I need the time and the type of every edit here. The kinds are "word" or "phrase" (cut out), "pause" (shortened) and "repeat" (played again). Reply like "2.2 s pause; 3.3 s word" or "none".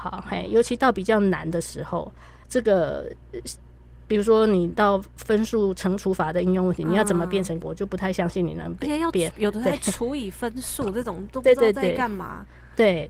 2.4 s pause; 7.6 s word